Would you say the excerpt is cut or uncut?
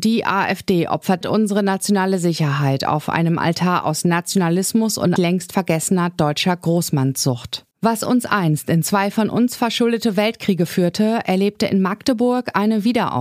cut